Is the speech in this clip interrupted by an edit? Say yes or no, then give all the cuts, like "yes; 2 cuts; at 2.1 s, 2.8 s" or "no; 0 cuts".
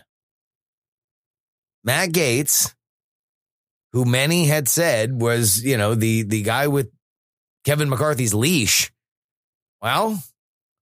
no; 0 cuts